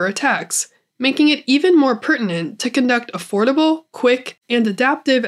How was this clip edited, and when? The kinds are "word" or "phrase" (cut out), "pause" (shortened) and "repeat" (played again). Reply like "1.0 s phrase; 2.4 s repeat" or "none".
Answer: none